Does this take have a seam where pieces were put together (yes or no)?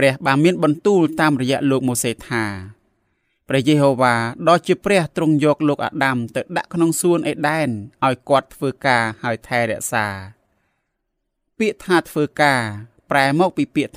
no